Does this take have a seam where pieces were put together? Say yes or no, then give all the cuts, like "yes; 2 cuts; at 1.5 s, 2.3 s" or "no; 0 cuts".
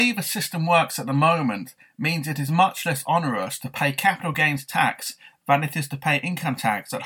no; 0 cuts